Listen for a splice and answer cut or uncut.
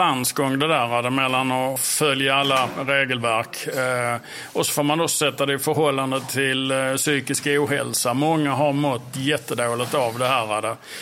uncut